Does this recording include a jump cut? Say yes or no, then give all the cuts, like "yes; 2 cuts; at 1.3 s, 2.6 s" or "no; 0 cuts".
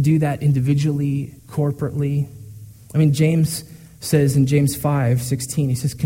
yes; 1 cut; at 1.4 s